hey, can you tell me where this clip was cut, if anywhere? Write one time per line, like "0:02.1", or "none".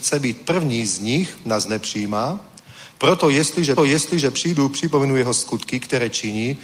0:03.8